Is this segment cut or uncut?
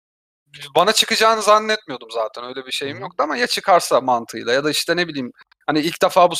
uncut